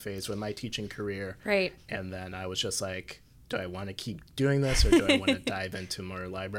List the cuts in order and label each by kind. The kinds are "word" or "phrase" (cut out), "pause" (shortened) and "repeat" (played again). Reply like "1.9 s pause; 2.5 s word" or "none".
none